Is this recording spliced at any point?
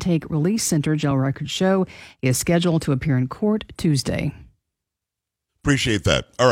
no; 0 cuts

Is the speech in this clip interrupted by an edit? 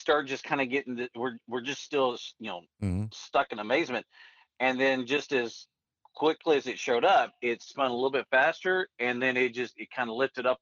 no; 0 cuts

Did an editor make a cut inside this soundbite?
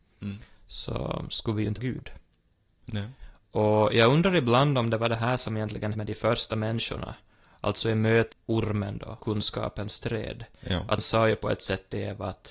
yes; 5 cuts; at 1.8 s, 5.9 s, 8.3 s, 9.2 s, 11.0 s

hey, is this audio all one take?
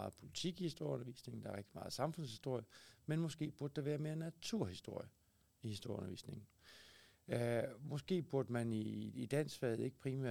yes; 0 cuts

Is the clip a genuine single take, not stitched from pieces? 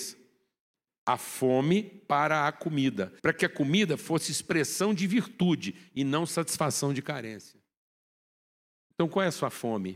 no; 1 cut; at 3.2 s

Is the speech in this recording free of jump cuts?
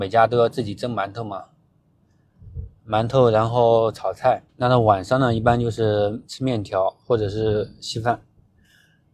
no; 2 cuts; at 4.5 s, 7.0 s

